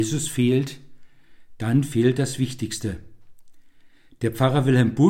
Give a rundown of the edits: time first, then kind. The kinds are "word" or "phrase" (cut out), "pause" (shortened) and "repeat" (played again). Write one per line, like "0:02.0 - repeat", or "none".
none